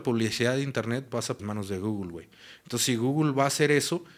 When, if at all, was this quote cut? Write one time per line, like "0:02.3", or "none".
0:01.4